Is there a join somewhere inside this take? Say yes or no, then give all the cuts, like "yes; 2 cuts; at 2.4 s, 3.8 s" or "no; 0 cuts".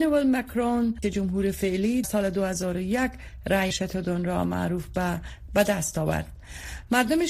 yes; 4 cuts; at 1.0 s, 2.0 s, 3.7 s, 5.5 s